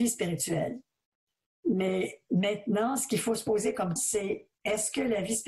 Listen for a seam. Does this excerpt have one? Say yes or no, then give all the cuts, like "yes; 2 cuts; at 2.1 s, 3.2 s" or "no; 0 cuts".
yes; 1 cut; at 4.0 s